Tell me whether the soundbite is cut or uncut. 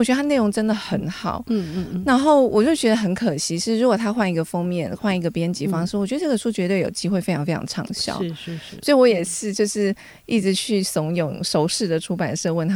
uncut